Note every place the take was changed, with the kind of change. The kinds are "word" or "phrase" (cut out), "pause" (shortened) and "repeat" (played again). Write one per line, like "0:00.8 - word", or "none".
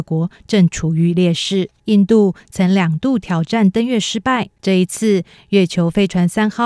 0:01.8 - pause
0:04.5 - pause